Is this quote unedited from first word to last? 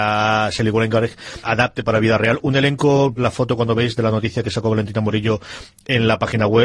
no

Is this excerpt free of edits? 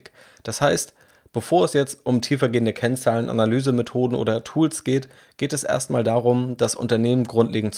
yes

